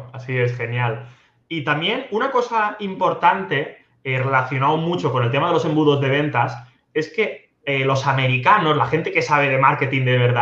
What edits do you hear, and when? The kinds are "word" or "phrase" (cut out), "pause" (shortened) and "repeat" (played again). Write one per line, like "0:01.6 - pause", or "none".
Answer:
none